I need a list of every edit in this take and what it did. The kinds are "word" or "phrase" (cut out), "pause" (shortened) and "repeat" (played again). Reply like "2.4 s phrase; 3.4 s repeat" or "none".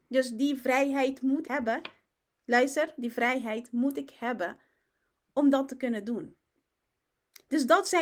1.4 s word